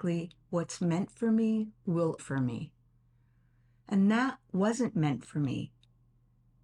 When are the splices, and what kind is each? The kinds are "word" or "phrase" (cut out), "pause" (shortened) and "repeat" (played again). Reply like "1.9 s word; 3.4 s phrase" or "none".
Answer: 2.2 s word